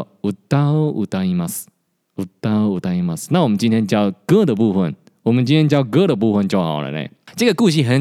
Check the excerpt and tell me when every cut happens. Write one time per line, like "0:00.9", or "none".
none